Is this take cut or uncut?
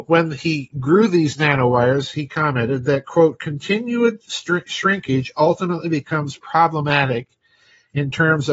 uncut